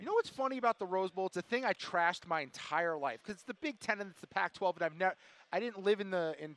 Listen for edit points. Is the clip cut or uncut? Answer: uncut